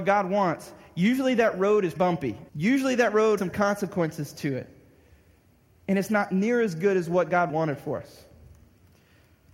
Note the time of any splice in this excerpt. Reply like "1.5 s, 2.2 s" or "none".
2.0 s, 2.5 s, 3.4 s, 7.5 s

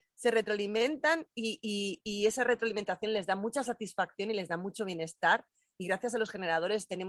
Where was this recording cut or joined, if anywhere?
none

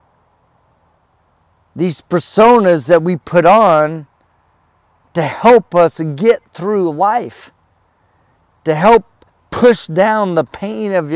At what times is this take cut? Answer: 9.3 s

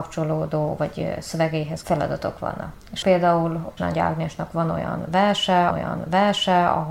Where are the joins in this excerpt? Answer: 1.8 s, 3.0 s, 3.8 s, 5.7 s

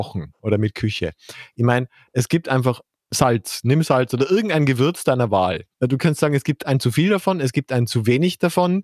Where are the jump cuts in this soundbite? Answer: 5.7 s

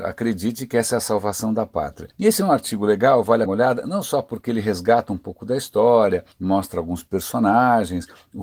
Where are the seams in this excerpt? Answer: 2.1 s, 3.5 s, 6.3 s

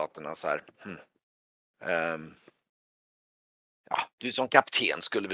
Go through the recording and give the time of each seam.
4.1 s

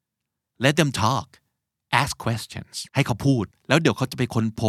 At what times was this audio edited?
2.9 s, 3.5 s

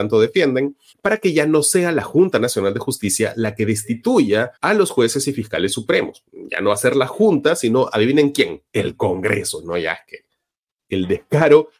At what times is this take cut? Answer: 0.9 s, 4.6 s, 8.7 s

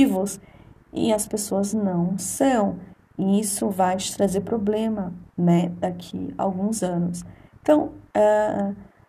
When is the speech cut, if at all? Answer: 5.3 s

